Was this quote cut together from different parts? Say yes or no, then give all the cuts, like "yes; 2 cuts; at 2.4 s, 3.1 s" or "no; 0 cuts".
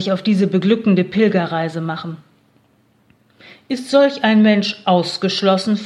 no; 0 cuts